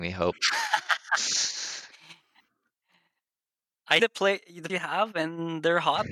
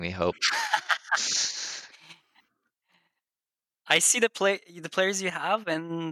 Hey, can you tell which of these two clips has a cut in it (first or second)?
first